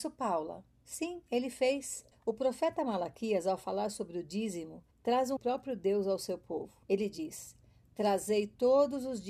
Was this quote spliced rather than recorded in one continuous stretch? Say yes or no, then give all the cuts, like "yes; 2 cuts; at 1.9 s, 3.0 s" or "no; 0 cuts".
yes; 4 cuts; at 2.1 s, 4.9 s, 5.4 s, 6.8 s